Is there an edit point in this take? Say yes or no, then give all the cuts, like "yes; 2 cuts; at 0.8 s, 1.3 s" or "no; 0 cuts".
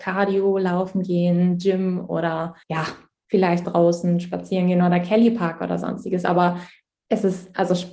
yes; 2 cuts; at 2.6 s, 3.6 s